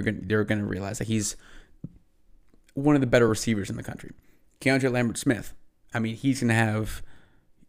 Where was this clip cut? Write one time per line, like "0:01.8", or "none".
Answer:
none